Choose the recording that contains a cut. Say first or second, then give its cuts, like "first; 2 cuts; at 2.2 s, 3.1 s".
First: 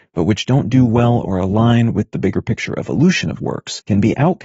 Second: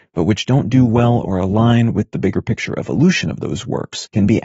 first; 1 cut; at 3.4 s